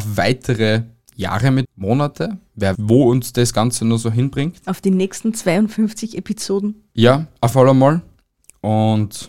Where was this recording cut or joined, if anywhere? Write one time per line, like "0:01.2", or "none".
0:01.6
0:02.7
0:07.5